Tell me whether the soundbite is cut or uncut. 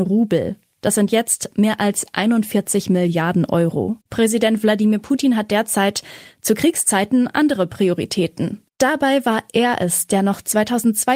cut